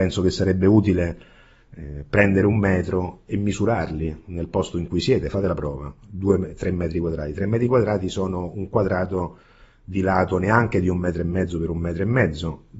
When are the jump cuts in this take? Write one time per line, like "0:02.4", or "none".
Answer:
none